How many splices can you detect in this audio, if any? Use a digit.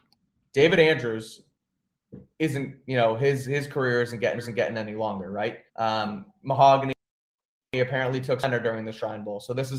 2